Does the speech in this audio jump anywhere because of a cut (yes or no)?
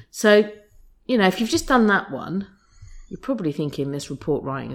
no